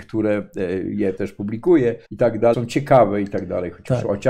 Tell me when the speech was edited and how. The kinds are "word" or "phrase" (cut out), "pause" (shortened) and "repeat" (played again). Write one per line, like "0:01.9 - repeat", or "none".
0:01.2 - word
0:02.0 - pause
0:02.5 - word